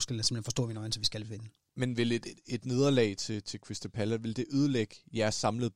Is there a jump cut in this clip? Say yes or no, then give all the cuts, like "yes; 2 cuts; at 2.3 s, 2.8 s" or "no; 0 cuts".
no; 0 cuts